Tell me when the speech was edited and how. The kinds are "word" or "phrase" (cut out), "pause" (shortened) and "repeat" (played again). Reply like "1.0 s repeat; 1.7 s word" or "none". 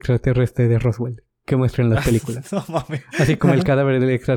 none